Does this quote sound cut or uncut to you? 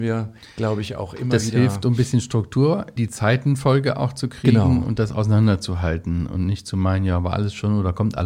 cut